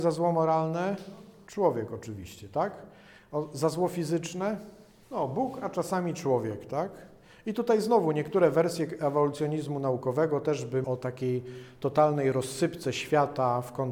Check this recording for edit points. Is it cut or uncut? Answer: cut